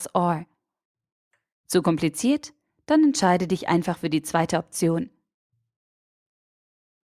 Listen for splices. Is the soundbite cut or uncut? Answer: uncut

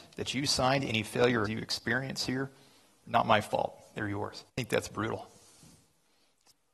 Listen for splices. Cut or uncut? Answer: cut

